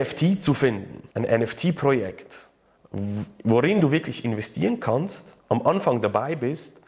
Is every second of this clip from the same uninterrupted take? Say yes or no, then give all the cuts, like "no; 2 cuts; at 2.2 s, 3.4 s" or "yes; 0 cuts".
no; 2 cuts; at 1.1 s, 5.4 s